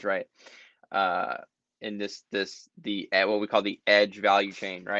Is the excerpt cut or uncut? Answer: uncut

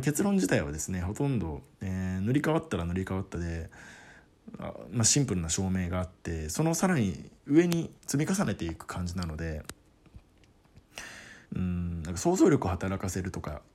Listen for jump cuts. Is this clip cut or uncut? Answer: cut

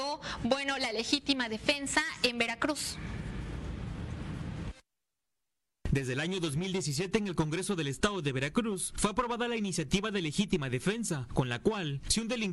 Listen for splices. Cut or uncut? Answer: uncut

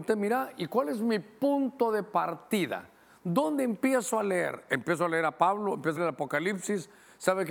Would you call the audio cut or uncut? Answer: cut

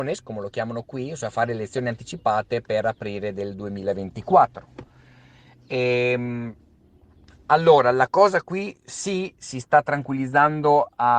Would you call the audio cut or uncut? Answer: uncut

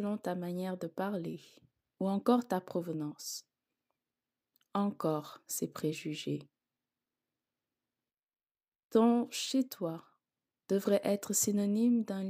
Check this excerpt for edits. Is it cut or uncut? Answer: uncut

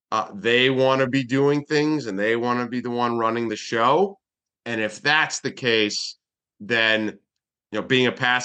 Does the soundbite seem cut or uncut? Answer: uncut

